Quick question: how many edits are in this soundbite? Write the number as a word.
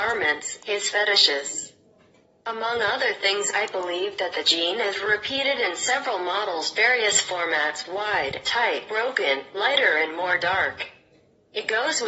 zero